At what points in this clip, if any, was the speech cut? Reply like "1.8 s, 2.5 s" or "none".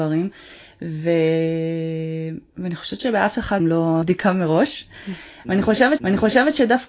2.5 s, 3.6 s, 4.0 s, 6.0 s